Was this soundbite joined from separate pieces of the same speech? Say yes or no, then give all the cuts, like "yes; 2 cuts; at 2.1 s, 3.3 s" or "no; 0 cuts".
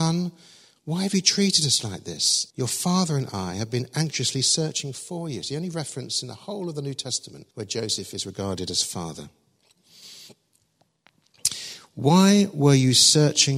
yes; 2 cuts; at 2.5 s, 7.5 s